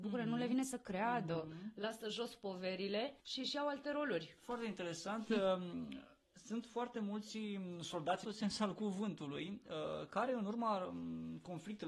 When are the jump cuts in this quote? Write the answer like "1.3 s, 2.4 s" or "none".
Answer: 3.2 s, 8.2 s

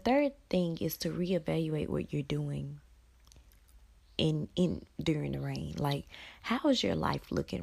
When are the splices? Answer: none

